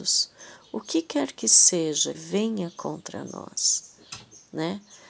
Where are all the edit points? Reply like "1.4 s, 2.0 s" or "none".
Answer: 2.1 s